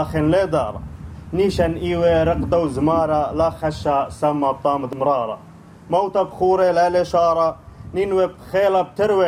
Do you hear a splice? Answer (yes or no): no